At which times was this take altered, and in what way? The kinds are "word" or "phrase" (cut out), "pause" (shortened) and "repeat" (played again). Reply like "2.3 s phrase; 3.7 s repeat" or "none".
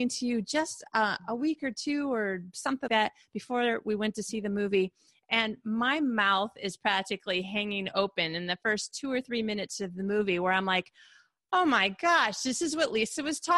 2.9 s word